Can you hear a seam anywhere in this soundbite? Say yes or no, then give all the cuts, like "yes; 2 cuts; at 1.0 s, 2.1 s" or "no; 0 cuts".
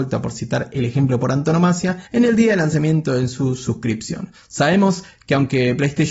yes; 1 cut; at 2.1 s